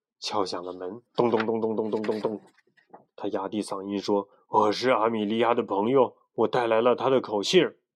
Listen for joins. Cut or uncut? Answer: cut